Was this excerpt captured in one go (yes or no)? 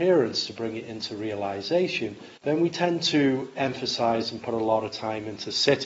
no